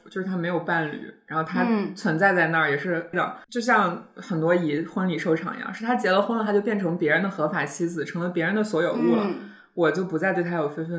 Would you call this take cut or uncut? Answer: cut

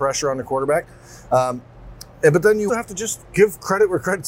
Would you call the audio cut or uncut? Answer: cut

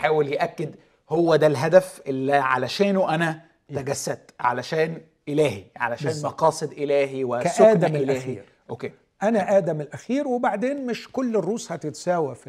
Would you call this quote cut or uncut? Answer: uncut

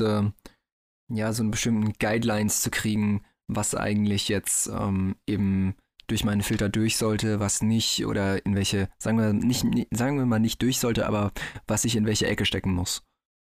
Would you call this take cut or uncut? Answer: uncut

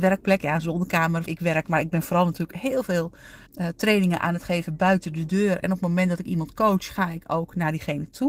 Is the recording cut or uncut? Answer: cut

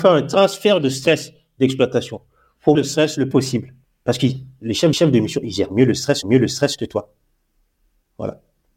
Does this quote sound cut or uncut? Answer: cut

